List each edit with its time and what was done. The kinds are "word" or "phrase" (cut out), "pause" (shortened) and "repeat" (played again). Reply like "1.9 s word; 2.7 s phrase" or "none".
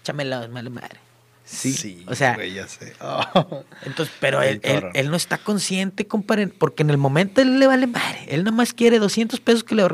none